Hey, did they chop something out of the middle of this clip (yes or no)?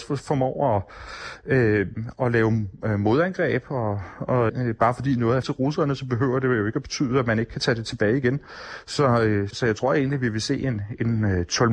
yes